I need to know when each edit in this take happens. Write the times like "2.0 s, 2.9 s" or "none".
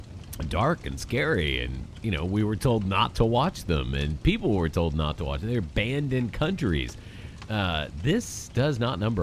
none